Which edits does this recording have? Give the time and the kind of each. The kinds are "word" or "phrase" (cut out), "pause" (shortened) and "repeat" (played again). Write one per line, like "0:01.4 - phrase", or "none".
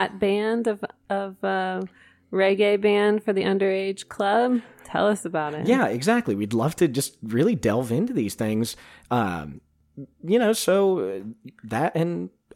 none